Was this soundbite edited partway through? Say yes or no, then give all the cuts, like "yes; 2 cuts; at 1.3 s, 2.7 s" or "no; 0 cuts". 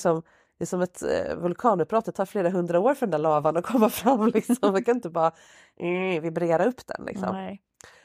no; 0 cuts